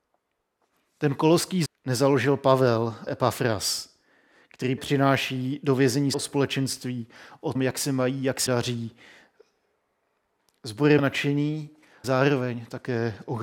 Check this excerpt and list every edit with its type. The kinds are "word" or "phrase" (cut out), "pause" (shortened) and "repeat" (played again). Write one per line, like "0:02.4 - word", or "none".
0:01.7 - word
0:03.1 - word
0:04.8 - word
0:06.1 - word
0:07.6 - word
0:08.5 - word
0:11.0 - word
0:12.0 - word